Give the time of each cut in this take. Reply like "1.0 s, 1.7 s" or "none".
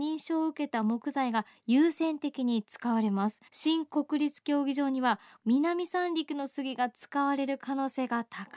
3.5 s